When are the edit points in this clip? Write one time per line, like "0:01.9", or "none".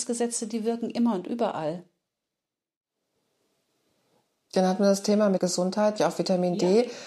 0:05.4
0:06.0